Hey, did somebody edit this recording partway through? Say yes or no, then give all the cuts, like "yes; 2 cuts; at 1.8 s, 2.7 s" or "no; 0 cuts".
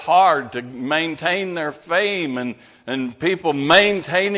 no; 0 cuts